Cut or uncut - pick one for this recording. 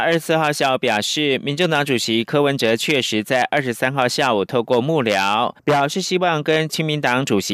cut